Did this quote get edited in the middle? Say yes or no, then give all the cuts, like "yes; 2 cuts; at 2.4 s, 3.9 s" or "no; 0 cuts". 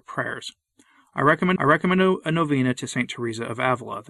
yes; 1 cut; at 1.6 s